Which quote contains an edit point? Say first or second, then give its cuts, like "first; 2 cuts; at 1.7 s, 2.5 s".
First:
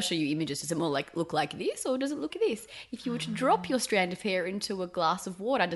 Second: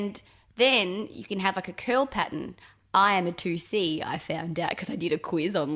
first; 1 cut; at 2.3 s